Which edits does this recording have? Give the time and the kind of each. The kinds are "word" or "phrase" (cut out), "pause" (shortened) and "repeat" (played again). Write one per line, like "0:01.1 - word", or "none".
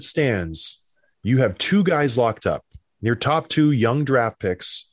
none